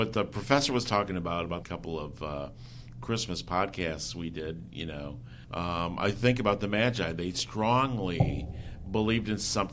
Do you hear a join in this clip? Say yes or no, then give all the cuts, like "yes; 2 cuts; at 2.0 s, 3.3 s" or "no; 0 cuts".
yes; 2 cuts; at 1.6 s, 5.4 s